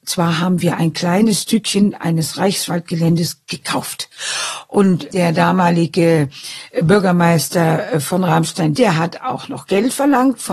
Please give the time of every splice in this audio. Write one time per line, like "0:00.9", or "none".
none